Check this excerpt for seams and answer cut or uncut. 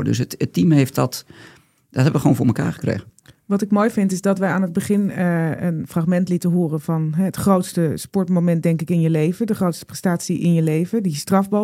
uncut